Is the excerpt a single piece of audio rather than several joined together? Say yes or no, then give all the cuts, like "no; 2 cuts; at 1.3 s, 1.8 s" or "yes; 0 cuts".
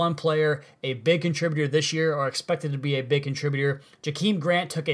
yes; 0 cuts